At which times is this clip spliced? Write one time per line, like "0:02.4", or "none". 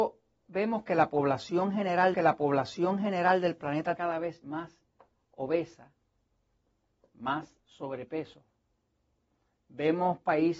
0:02.1
0:04.0
0:07.6

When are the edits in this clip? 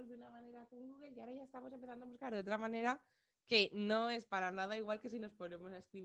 none

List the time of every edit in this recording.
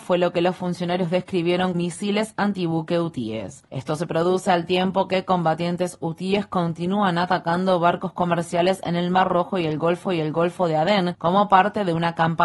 0:01.7
0:10.1

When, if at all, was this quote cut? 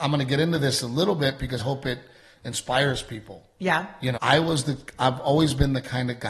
0:01.6
0:04.1

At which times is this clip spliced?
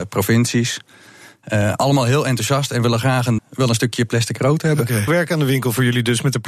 0:03.4
0:05.1

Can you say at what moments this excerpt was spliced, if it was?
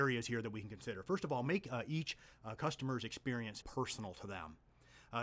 0:03.6

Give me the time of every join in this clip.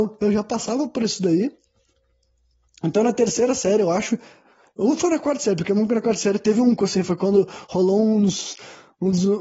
0:06.8

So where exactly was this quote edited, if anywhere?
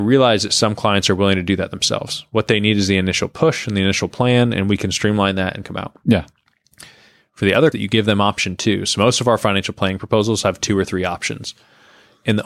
0:05.6
0:07.7

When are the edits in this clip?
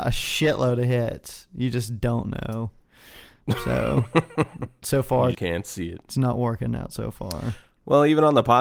0:05.3

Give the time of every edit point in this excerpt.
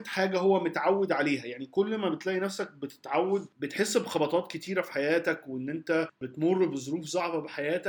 none

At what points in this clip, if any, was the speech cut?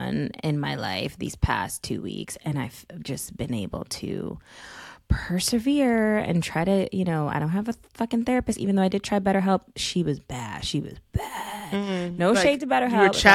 none

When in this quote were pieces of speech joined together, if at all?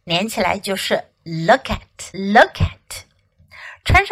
0:02.1

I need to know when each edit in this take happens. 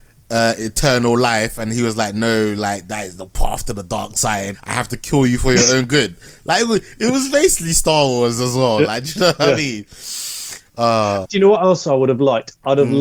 0:04.5
0:11.2

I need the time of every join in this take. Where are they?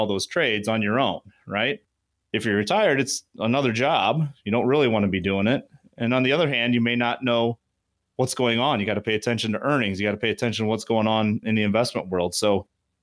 none

